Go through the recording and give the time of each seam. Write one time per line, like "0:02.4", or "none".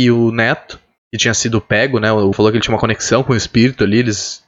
0:01.0
0:02.3